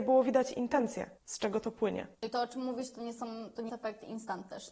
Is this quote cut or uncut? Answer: cut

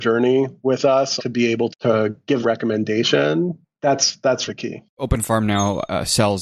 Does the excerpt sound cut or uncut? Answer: cut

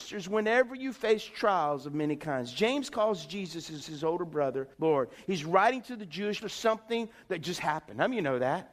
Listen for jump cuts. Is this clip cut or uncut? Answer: cut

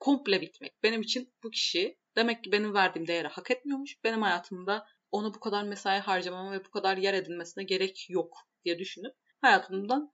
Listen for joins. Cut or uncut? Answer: uncut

